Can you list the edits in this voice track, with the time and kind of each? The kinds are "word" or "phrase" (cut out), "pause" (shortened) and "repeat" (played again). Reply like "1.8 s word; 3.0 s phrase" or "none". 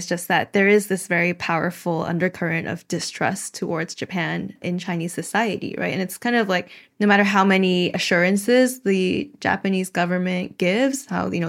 none